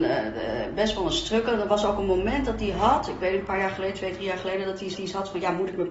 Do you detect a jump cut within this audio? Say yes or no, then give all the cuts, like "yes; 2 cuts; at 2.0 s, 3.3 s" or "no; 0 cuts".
yes; 1 cut; at 4.9 s